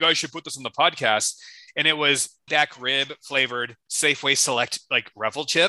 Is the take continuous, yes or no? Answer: no